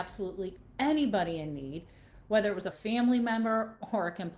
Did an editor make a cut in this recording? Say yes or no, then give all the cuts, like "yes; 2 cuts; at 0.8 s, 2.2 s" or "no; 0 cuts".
yes; 1 cut; at 2.7 s